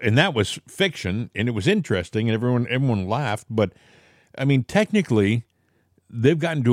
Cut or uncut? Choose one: uncut